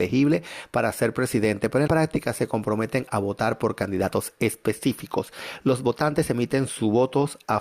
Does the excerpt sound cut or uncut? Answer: cut